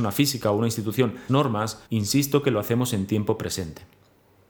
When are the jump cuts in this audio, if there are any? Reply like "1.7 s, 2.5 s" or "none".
1.3 s, 1.9 s